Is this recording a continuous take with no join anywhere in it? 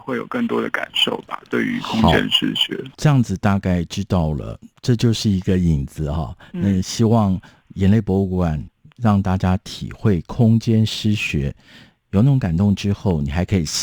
no; 1 cut; at 2.9 s

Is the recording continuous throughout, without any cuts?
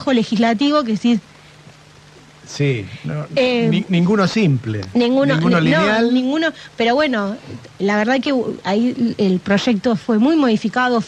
yes; 0 cuts

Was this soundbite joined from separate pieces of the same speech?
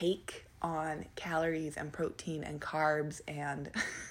no; 0 cuts

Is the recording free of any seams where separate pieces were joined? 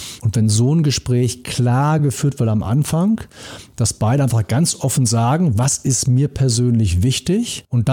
yes; 0 cuts

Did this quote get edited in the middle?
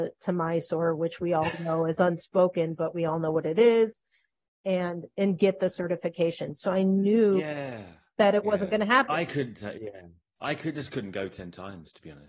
no; 0 cuts

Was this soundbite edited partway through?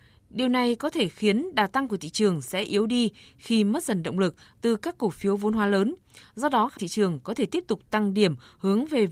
yes; 1 cut; at 6.8 s

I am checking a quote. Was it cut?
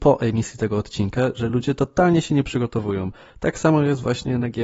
no; 0 cuts

